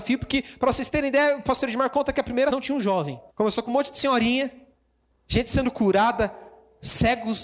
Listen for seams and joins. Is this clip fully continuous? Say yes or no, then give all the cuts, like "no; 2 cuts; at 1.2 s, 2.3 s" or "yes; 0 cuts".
no; 2 cuts; at 2.5 s, 3.3 s